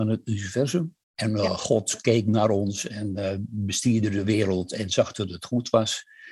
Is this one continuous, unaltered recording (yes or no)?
no